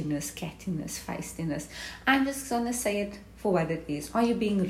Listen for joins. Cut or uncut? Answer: uncut